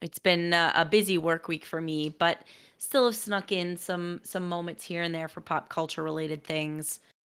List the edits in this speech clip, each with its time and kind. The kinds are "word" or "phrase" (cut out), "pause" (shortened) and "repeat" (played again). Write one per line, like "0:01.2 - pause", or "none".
none